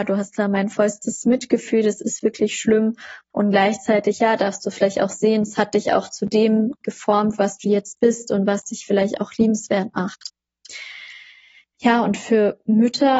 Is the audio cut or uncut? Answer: uncut